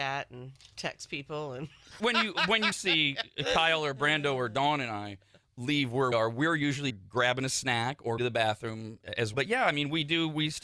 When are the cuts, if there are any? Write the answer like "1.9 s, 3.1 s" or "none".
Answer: 2.0 s, 2.7 s, 6.1 s, 6.9 s, 8.2 s, 9.3 s